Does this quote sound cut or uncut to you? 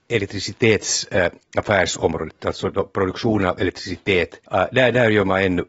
cut